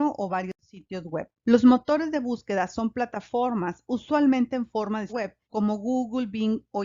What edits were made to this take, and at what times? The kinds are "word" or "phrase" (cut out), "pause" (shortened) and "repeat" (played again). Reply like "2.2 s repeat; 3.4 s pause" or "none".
1.4 s pause; 5.1 s word; 5.4 s pause